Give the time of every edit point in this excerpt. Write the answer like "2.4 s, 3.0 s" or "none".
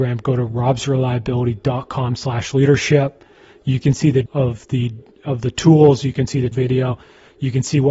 4.3 s, 6.5 s